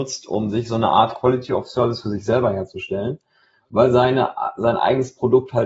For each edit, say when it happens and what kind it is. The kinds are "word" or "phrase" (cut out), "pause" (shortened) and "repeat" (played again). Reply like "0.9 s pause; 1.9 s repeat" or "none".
none

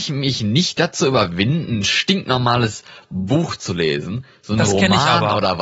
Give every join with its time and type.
none

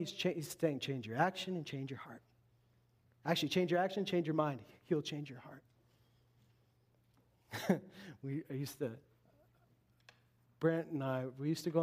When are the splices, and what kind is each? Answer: none

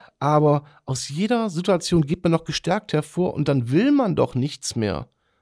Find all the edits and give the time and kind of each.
none

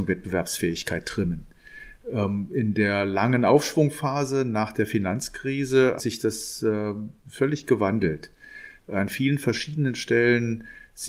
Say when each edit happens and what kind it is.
6.0 s word

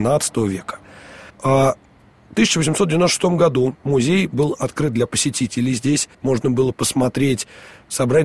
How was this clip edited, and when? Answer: 1.3 s pause; 6.1 s pause

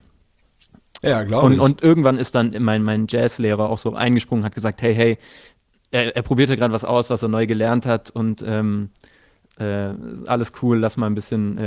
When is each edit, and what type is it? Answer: none

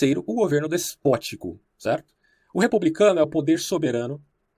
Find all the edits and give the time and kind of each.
1.7 s pause

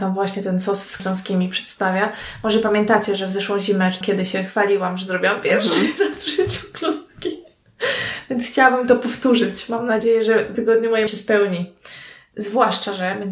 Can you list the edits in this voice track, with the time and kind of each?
1.0 s word; 4.0 s word; 10.5 s word; 11.1 s word

